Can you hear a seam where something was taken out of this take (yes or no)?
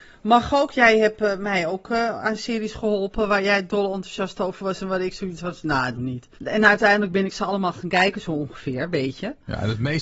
yes